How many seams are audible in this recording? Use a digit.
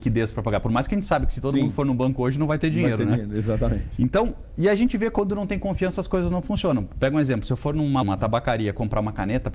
1